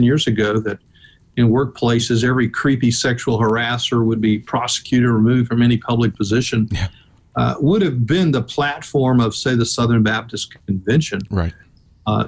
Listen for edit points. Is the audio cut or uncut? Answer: uncut